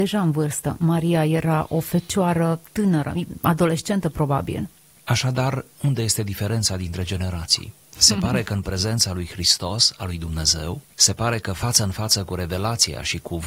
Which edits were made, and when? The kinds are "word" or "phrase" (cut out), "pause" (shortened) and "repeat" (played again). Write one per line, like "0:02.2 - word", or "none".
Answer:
0:05.7 - pause
0:10.8 - pause

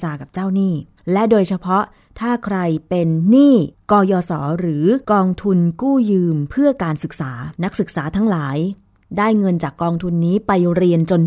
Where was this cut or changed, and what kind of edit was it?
0:01.0 - pause
0:03.7 - pause
0:05.0 - pause
0:07.5 - pause

